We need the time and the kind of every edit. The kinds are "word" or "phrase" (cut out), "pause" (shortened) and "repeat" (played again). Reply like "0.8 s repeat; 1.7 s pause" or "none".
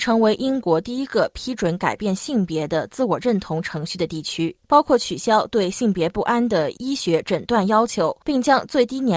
4.6 s pause; 8.2 s pause